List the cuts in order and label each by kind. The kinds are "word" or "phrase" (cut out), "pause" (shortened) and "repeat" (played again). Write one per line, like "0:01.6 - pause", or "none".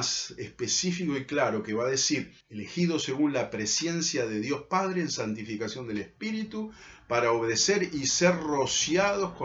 0:02.4 - pause